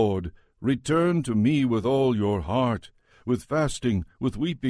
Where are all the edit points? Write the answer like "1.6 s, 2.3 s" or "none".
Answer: none